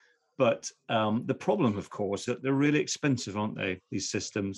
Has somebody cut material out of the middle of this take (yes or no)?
yes